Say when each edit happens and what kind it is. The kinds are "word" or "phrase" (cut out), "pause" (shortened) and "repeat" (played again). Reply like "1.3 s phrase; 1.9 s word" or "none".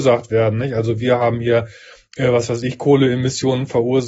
none